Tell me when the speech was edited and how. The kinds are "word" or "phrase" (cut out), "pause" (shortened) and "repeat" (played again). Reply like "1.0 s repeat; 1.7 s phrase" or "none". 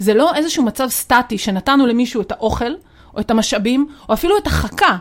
none